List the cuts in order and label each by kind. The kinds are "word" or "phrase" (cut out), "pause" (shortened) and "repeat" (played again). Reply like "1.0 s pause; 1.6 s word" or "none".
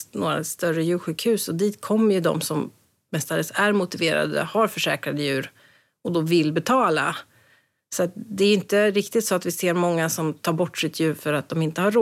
none